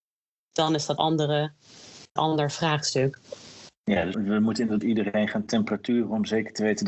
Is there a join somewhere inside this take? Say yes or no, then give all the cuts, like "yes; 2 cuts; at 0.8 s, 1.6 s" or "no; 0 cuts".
yes; 4 cuts; at 1.0 s, 2.2 s, 4.1 s, 4.8 s